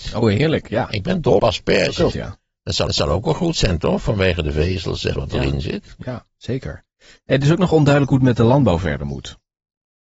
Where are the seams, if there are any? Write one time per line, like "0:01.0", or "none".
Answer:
0:01.4
0:02.1
0:02.9
0:05.1

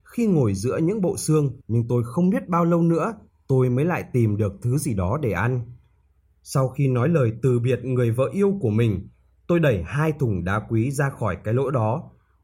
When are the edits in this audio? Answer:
0:01.6

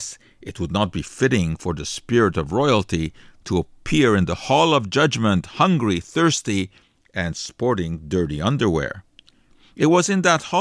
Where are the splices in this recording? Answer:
none

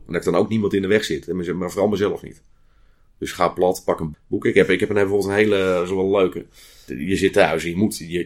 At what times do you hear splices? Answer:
none

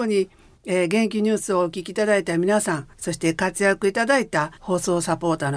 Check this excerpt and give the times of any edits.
0:02.9
0:04.6

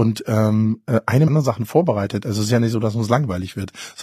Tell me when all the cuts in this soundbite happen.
0:01.3

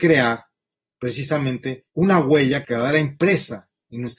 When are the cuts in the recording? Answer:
0:01.9
0:02.6

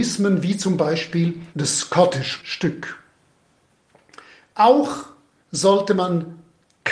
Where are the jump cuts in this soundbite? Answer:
0:01.5
0:02.4

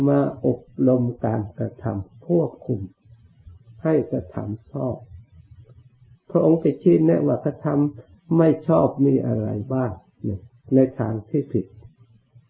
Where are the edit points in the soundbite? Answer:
none

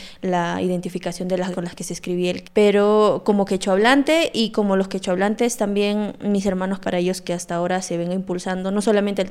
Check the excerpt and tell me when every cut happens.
0:01.5
0:02.4
0:06.8

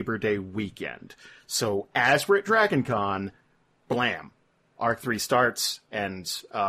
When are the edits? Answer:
none

